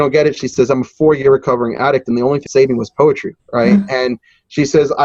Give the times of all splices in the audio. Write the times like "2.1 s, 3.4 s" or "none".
2.5 s, 3.4 s